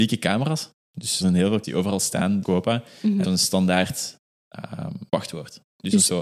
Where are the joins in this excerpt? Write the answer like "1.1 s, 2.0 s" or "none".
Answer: 1.2 s, 1.6 s, 2.4 s, 3.2 s, 5.1 s